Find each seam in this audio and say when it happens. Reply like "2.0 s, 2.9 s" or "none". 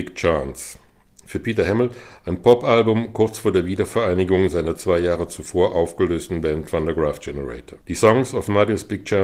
7.8 s